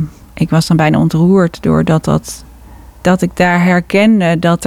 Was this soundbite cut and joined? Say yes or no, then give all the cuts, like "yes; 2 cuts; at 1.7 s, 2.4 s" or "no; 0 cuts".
no; 0 cuts